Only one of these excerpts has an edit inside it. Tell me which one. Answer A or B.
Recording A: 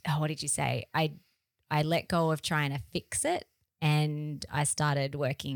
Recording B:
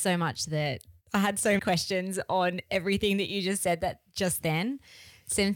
B